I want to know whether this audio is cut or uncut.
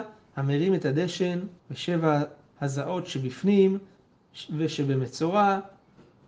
cut